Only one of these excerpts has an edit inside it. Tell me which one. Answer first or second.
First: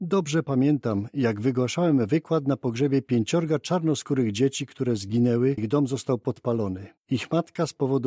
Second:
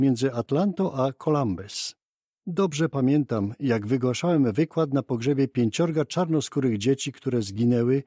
first